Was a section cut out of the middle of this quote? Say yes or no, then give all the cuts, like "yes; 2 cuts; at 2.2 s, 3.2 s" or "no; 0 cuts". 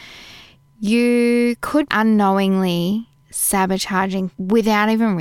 yes; 2 cuts; at 1.9 s, 4.3 s